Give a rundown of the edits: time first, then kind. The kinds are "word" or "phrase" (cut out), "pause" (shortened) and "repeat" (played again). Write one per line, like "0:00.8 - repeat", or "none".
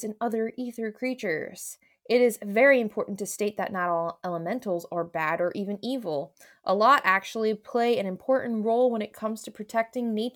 none